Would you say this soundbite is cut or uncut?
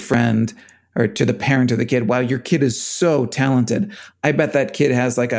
uncut